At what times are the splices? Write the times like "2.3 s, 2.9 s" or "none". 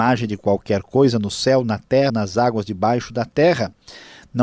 2.1 s

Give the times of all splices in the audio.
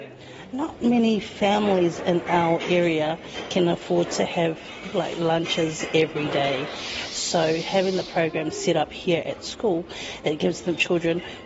none

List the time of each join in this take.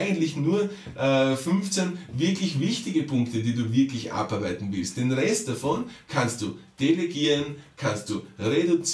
none

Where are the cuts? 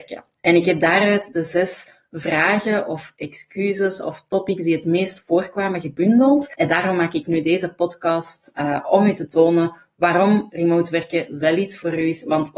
none

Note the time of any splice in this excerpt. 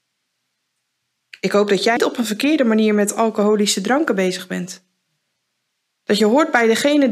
2.0 s

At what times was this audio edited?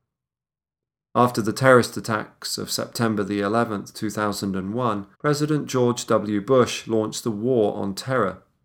5.1 s

